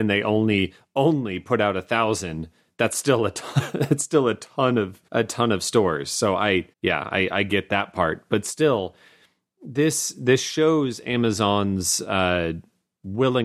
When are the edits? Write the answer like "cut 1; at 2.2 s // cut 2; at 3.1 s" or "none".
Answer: cut 1; at 5.1 s // cut 2; at 6.7 s